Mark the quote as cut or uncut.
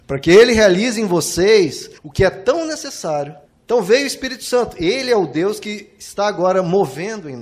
cut